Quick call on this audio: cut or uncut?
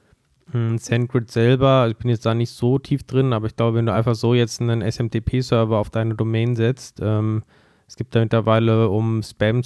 uncut